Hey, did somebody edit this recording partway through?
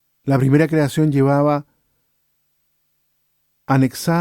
no; 0 cuts

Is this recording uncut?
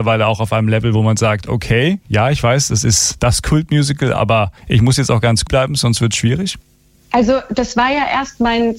no; 2 cuts; at 4.6 s, 5.5 s

